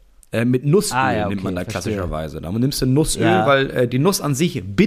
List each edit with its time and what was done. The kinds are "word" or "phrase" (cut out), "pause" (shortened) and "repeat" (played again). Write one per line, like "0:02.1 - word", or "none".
none